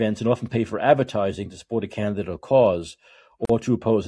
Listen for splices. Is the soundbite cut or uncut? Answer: uncut